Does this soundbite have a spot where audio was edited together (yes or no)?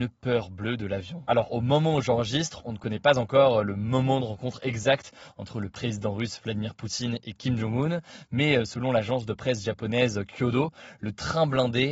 no